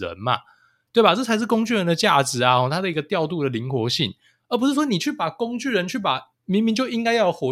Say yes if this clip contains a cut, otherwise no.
yes